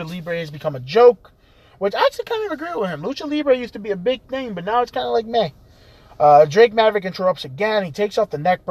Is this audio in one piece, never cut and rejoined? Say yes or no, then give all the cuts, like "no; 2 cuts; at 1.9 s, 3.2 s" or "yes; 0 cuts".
yes; 0 cuts